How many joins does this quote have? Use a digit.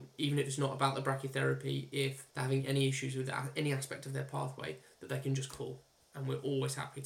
1